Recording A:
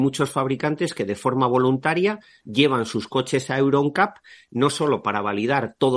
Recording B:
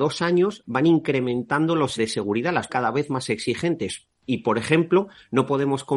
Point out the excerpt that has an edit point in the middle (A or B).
B